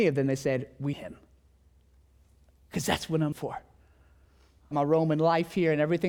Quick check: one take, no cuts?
no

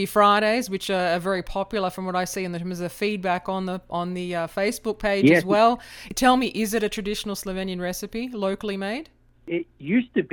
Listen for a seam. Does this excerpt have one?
no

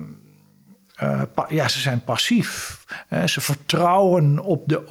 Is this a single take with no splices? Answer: yes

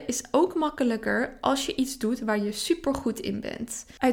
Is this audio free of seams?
yes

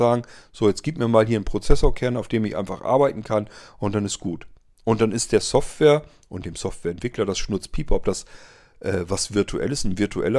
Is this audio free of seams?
yes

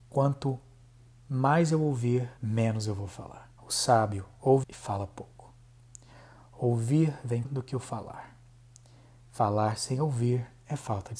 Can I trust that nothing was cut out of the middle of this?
no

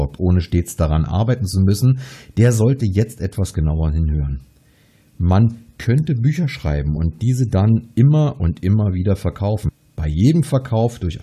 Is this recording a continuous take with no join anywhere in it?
yes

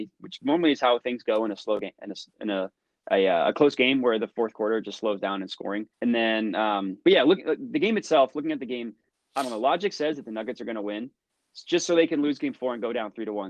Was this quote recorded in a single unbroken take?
no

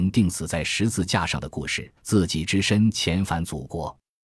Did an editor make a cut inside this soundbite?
yes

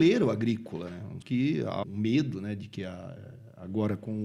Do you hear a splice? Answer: yes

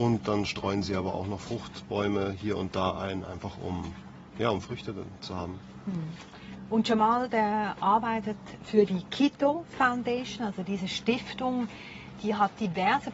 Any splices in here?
no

